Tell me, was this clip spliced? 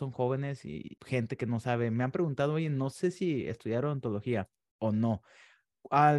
no; 0 cuts

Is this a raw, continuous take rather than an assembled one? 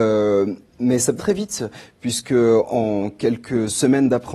no; 1 cut; at 1.2 s

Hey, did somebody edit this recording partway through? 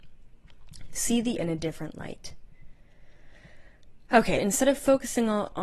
yes; 2 cuts; at 1.4 s, 4.4 s

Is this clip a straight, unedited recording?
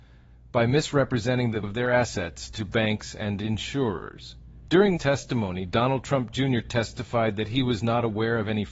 no; 2 cuts; at 1.6 s, 5.0 s

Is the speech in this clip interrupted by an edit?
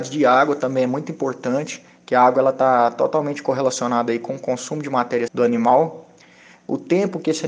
yes; 1 cut; at 5.3 s

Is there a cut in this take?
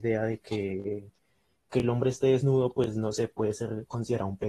no; 0 cuts

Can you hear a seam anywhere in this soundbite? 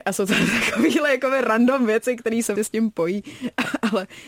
yes; 1 cut; at 2.6 s

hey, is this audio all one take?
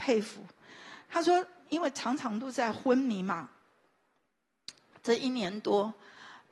yes; 0 cuts

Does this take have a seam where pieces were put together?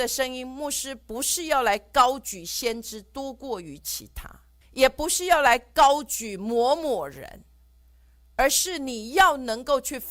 yes; 1 cut; at 4.6 s

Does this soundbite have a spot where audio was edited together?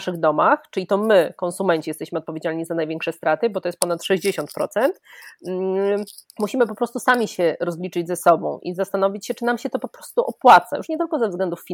yes; 1 cut; at 6.3 s

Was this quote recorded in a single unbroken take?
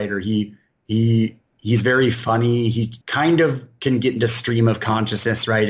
no; 1 cut; at 3.0 s

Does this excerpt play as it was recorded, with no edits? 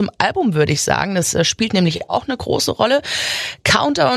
yes; 0 cuts

